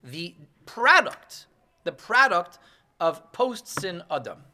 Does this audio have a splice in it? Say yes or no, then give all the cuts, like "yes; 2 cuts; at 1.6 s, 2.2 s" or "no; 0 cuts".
no; 0 cuts